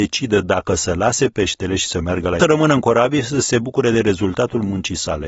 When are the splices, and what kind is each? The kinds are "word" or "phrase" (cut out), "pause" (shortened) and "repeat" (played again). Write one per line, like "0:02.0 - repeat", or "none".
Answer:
0:02.4 - phrase